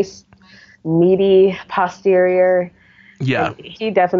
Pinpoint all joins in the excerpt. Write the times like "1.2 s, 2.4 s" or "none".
none